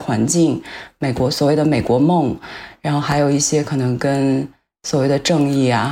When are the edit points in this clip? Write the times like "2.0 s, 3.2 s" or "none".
none